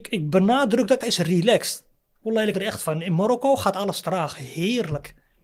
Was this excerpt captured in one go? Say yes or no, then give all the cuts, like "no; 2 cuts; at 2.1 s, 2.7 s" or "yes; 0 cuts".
no; 2 cuts; at 1.0 s, 2.5 s